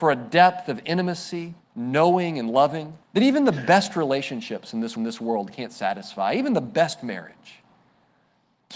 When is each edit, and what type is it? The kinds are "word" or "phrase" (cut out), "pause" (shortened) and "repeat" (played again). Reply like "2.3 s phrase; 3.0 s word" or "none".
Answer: 1.6 s pause; 3.0 s pause; 5.0 s repeat